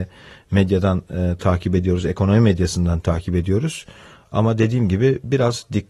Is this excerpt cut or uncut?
uncut